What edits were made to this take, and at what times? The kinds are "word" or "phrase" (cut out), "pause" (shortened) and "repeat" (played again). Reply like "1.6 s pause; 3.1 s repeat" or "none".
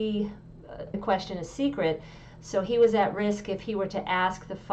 0.9 s word